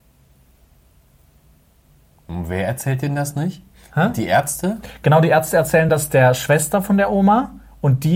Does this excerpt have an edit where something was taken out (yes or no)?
no